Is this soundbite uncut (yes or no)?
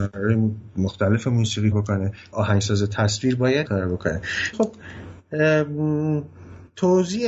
no